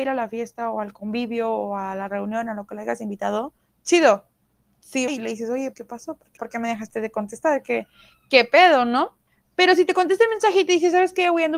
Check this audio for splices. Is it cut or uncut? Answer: cut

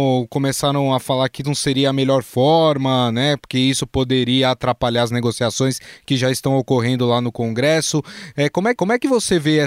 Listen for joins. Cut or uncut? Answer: cut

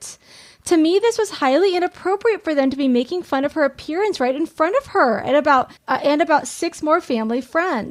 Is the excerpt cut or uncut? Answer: cut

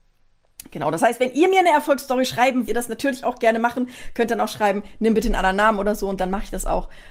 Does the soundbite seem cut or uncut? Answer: cut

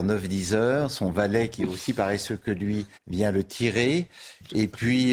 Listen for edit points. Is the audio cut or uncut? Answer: cut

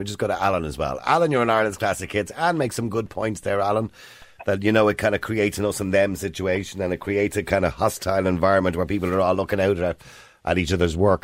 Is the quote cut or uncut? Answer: uncut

